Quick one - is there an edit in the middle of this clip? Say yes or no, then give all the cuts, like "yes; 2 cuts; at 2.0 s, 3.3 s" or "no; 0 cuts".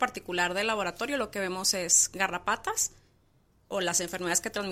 no; 0 cuts